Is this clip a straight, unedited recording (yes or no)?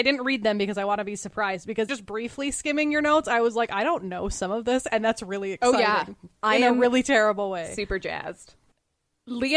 no